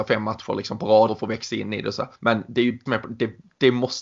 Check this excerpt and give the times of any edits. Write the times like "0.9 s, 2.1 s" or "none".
1.1 s, 2.1 s, 2.9 s